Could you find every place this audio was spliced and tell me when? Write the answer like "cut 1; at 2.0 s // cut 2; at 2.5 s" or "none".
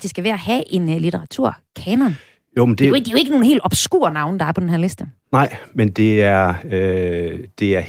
none

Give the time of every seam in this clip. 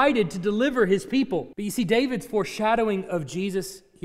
cut 1; at 1.5 s

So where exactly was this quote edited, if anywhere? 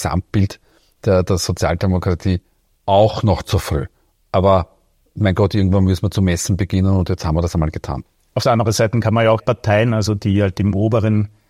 cut 1; at 9.4 s

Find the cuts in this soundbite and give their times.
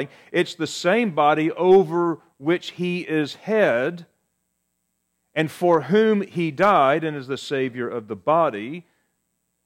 none

